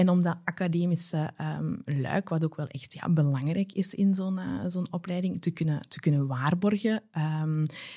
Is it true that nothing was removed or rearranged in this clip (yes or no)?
yes